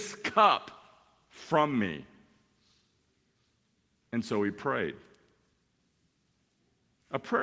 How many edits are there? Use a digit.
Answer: 0